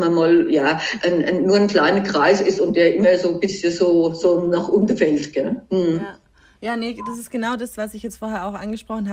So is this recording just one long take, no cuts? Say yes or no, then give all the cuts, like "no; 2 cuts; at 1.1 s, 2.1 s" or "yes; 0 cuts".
yes; 0 cuts